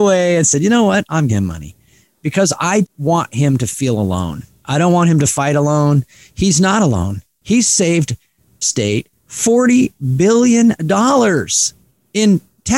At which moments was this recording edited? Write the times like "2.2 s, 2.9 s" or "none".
1.3 s, 2.8 s, 8.6 s